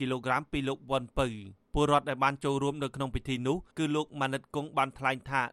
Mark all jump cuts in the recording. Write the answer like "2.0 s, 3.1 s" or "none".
1.6 s, 3.7 s